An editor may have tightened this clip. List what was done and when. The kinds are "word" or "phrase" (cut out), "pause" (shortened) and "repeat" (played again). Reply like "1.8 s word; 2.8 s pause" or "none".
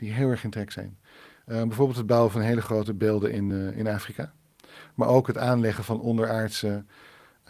none